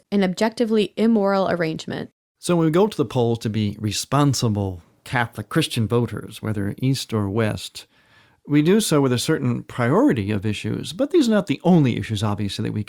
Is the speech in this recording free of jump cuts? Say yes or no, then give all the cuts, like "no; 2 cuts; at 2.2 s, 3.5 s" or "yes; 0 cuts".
yes; 0 cuts